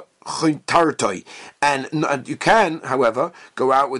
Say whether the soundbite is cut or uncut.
uncut